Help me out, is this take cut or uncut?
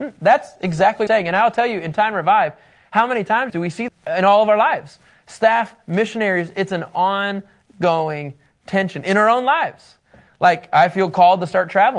cut